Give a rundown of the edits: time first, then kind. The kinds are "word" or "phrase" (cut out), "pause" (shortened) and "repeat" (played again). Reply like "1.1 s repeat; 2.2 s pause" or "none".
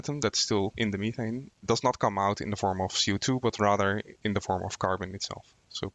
none